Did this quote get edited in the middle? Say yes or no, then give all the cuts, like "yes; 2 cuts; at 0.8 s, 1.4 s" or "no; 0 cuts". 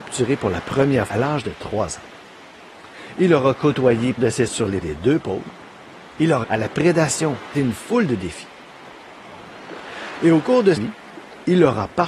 yes; 7 cuts; at 1.1 s, 4.2 s, 4.5 s, 4.8 s, 6.4 s, 7.5 s, 10.8 s